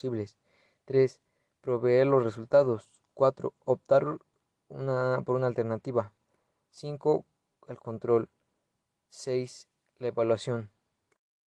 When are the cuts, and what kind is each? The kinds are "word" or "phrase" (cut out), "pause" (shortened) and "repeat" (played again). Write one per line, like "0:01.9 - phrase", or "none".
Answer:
none

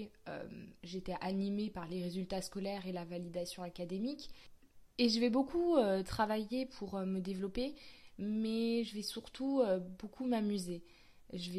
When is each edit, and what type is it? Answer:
none

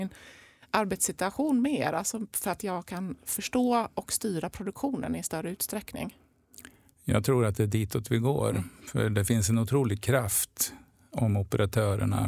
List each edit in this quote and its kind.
none

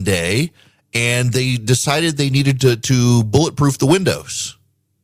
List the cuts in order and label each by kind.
none

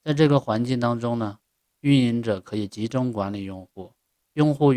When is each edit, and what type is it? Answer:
none

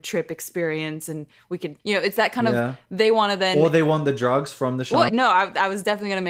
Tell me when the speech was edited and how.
0:01.8 - pause
0:05.1 - word

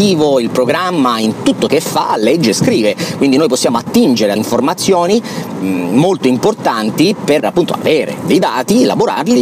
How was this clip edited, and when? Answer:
0:01.7 - word
0:04.4 - word
0:05.6 - word
0:07.4 - word

